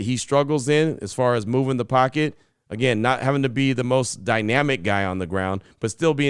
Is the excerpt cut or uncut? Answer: uncut